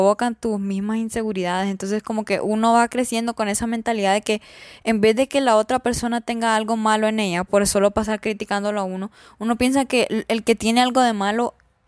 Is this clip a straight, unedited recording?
yes; 0 cuts

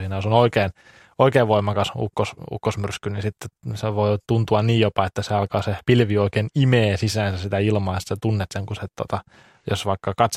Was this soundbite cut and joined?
no; 0 cuts

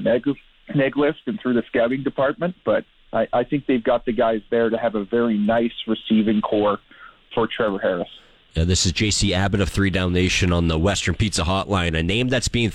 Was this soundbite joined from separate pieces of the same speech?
no; 0 cuts

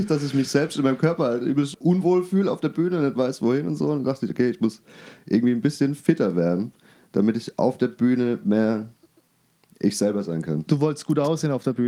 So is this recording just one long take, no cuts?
no; 1 cut; at 1.7 s

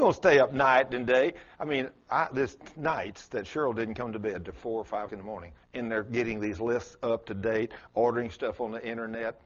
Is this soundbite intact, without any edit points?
no; 2 cuts; at 5.1 s, 5.6 s

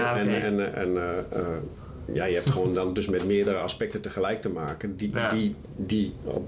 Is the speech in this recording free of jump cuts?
yes; 0 cuts

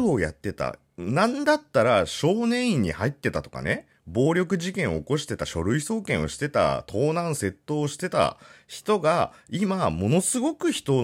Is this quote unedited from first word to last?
yes; 0 cuts

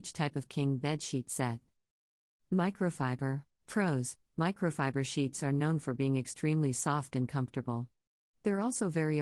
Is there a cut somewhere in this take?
yes; 1 cut; at 3.5 s

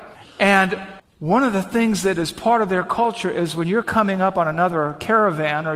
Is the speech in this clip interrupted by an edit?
no; 0 cuts

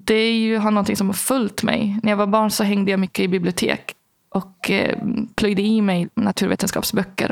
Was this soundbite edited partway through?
no; 0 cuts

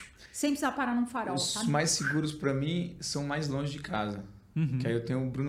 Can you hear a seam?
no; 0 cuts

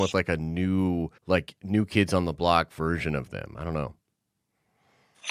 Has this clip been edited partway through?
yes; 1 cut; at 1.2 s

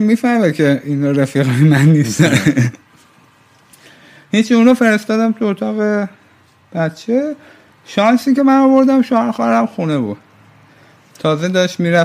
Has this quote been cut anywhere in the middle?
no; 0 cuts

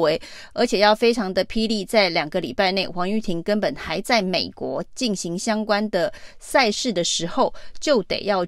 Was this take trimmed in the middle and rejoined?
no; 0 cuts

